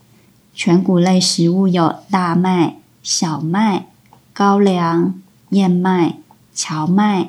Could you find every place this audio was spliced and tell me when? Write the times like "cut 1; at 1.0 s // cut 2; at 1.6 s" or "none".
none